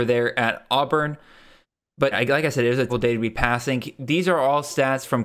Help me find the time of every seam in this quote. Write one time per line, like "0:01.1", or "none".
0:02.1
0:02.9